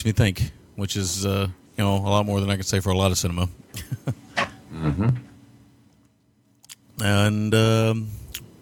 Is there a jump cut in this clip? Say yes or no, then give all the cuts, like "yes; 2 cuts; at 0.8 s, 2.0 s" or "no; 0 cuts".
yes; 1 cut; at 1.7 s